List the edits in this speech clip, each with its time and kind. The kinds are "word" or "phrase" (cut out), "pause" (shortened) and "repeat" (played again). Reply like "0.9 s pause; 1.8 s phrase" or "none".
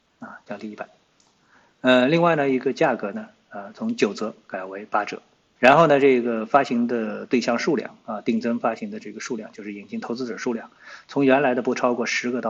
5.6 s word